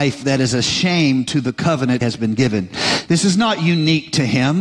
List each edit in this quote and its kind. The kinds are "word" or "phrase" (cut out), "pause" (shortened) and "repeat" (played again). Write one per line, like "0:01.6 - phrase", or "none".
0:02.0 - word